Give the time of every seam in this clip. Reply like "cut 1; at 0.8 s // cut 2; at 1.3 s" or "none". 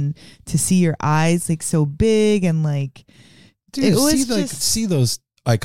none